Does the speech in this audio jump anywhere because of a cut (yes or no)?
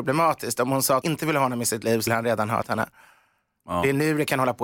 yes